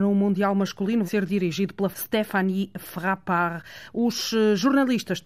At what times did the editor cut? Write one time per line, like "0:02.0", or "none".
0:01.0
0:01.9